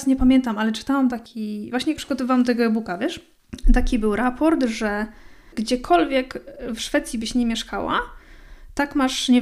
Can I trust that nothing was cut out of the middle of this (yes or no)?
no